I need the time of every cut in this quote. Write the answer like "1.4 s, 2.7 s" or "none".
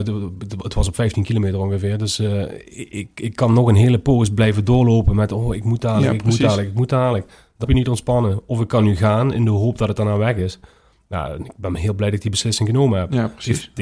7.6 s

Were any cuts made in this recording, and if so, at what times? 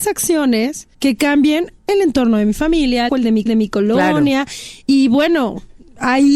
0.9 s, 1.8 s, 3.1 s, 3.5 s

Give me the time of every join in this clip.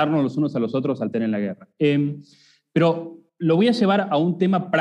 1.1 s, 1.7 s, 3.3 s

